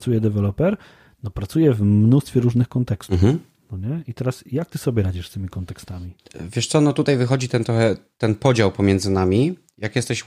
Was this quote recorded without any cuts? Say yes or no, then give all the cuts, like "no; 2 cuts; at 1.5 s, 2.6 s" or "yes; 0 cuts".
yes; 0 cuts